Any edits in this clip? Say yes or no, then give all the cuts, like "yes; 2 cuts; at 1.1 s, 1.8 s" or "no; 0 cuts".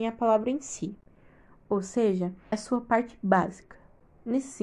yes; 1 cut; at 2.5 s